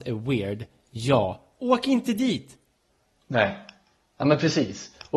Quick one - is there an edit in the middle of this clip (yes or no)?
no